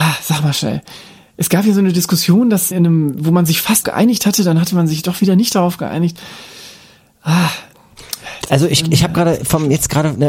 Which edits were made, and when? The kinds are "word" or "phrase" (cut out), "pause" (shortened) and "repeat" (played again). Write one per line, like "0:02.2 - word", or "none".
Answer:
0:02.7 - word
0:03.8 - word